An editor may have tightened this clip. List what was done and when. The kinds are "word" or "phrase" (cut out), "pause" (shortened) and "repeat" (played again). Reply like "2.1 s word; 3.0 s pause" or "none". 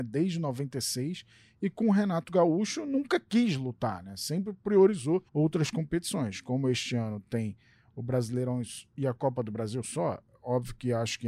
5.3 s pause